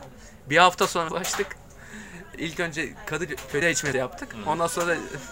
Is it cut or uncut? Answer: cut